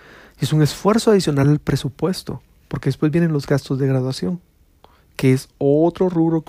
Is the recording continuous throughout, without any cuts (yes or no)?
yes